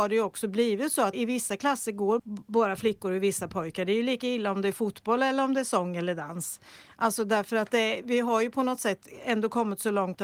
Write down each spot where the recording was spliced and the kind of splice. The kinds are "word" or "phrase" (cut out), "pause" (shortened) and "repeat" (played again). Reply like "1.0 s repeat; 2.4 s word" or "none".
1.1 s word; 2.2 s word; 8.0 s word